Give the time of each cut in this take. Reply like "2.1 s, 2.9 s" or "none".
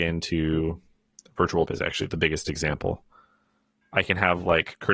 1.7 s, 2.1 s